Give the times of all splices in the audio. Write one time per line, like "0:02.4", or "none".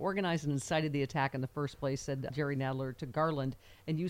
0:02.3

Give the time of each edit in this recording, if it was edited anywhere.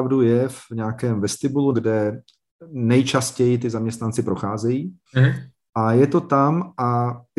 0:01.7
0:05.1

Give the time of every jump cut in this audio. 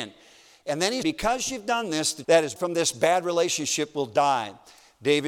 0:01.0
0:02.2
0:02.5

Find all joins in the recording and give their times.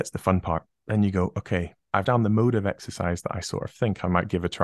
0:02.0

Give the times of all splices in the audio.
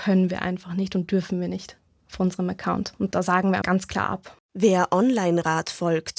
0:03.6

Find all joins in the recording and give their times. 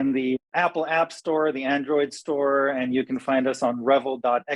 none

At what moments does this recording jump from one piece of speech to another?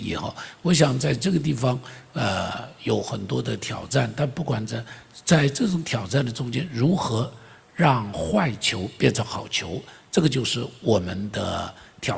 none

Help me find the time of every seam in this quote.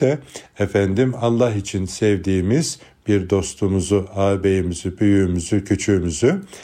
none

